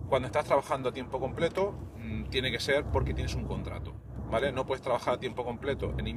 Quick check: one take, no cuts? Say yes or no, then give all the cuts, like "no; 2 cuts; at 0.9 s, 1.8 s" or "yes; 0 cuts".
yes; 0 cuts